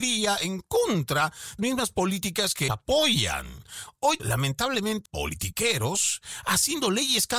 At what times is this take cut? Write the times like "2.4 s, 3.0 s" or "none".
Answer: 1.6 s, 2.7 s, 4.2 s, 5.0 s